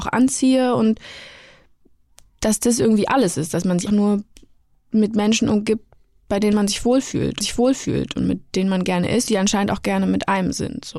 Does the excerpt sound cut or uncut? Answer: cut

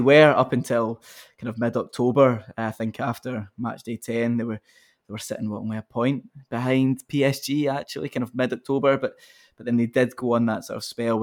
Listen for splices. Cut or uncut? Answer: uncut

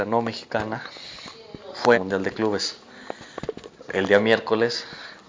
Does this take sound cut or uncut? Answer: cut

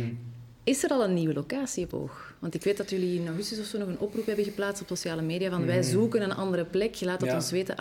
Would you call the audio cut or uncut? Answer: cut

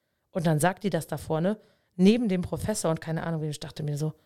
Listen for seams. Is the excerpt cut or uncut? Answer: uncut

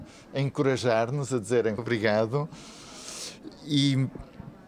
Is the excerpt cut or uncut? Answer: cut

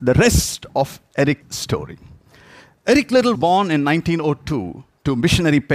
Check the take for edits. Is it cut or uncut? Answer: cut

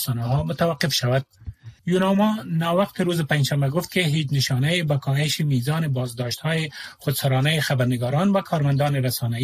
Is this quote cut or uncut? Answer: cut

